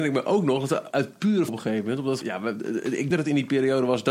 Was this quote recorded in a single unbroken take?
no; 4 cuts; at 0.9 s, 1.5 s, 2.2 s, 3.1 s

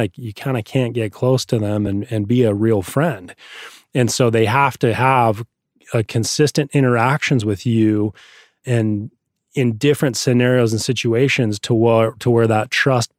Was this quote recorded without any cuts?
yes; 0 cuts

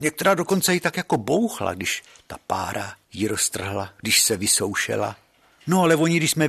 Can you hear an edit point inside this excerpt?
no; 0 cuts

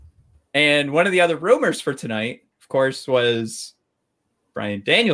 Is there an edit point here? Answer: no; 0 cuts

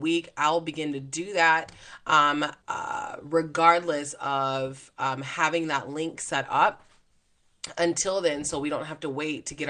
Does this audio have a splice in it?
yes; 1 cut; at 2.6 s

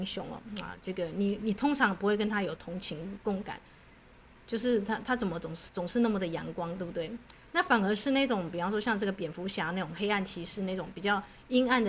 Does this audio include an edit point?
no; 0 cuts

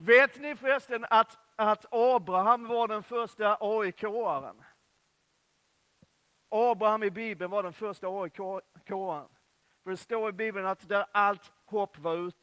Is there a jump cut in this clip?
no; 0 cuts

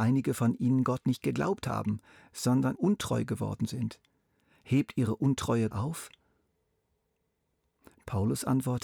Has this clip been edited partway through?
yes; 2 cuts; at 2.8 s, 5.7 s

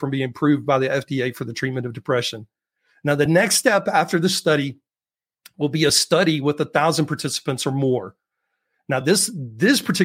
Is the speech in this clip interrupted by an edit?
no; 0 cuts

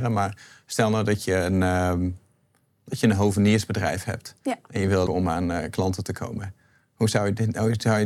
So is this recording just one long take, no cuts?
no; 1 cut; at 5.1 s

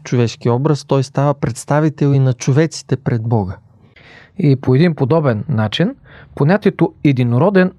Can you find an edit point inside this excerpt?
no; 0 cuts

